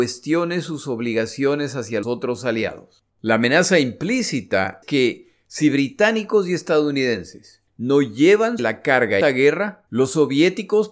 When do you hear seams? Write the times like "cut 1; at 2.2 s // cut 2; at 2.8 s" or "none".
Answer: cut 1; at 2.0 s // cut 2; at 3.1 s // cut 3; at 4.8 s // cut 4; at 7.7 s // cut 5; at 8.6 s // cut 6; at 9.2 s // cut 7; at 9.9 s